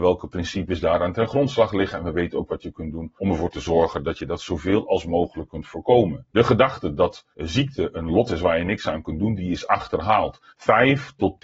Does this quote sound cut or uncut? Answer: cut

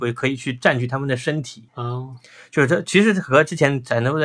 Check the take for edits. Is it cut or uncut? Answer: cut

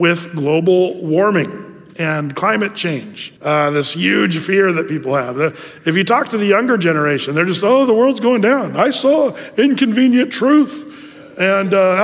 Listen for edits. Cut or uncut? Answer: cut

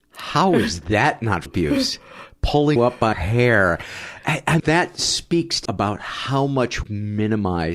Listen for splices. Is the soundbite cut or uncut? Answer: cut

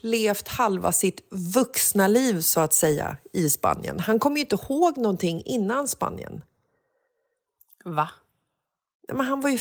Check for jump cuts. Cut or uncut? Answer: uncut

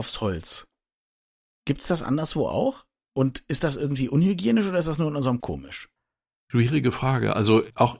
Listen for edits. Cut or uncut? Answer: cut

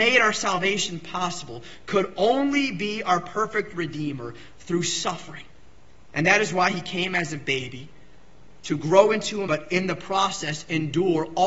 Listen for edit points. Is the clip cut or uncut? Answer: cut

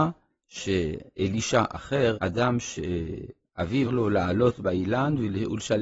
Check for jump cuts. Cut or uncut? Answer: cut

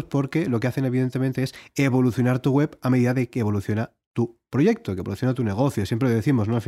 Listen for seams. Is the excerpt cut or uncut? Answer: uncut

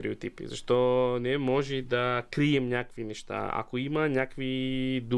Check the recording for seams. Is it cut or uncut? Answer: uncut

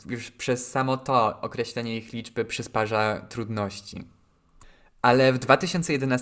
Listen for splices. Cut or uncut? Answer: uncut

